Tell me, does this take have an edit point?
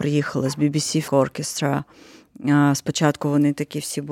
yes; 1 cut; at 1.1 s

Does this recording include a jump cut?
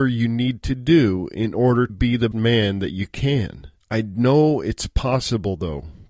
yes; 3 cuts; at 1.9 s, 2.3 s, 3.8 s

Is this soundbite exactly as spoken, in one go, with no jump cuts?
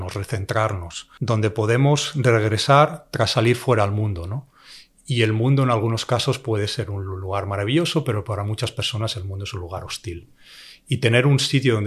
yes; 0 cuts

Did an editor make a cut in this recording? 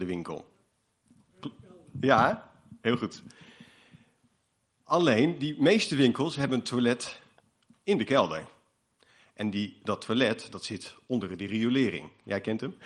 no; 0 cuts

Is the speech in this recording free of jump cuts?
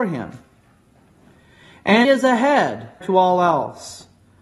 no; 2 cuts; at 2.0 s, 3.0 s

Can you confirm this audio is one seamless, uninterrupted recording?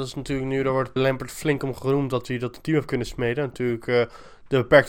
no; 1 cut; at 1.0 s

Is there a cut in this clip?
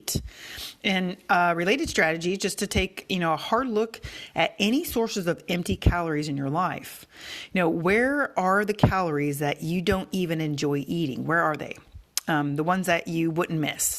no; 0 cuts

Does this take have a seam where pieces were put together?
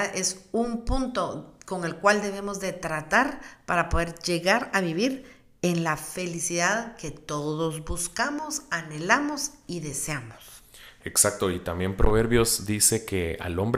no; 0 cuts

